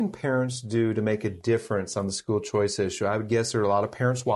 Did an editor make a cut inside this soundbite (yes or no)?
no